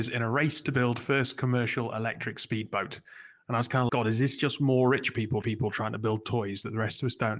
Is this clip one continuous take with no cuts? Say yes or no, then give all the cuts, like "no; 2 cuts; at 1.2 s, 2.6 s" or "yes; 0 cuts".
no; 2 cuts; at 3.9 s, 5.4 s